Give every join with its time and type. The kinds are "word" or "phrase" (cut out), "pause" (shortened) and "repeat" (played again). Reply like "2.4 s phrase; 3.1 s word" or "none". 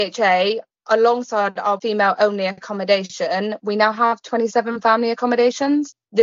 none